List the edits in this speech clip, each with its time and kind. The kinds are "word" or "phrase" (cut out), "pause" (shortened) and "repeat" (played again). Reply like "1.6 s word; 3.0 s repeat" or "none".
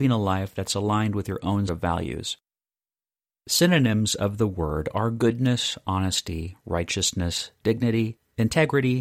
1.7 s word